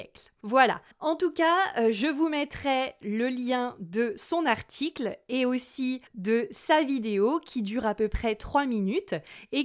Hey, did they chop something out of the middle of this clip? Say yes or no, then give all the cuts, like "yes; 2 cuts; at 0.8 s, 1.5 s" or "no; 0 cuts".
yes; 2 cuts; at 0.9 s, 6.1 s